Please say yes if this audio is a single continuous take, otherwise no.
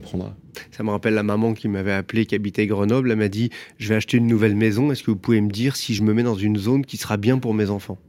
yes